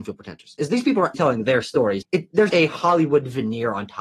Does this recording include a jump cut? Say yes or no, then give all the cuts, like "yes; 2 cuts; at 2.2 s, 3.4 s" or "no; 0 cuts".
yes; 3 cuts; at 1.1 s, 2.0 s, 2.5 s